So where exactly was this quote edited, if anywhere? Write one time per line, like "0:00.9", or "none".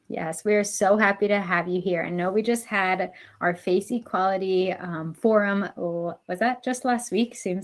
none